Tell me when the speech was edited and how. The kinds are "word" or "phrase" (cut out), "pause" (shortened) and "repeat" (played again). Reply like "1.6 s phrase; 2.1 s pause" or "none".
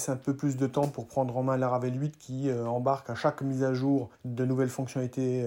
4.1 s pause